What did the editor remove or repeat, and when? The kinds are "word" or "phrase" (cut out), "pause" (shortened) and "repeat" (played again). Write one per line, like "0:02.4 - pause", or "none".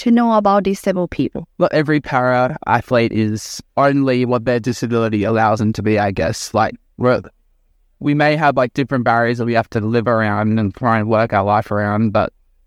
0:01.5 - pause
0:03.7 - pause